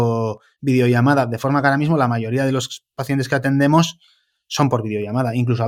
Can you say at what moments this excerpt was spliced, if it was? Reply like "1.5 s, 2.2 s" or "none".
none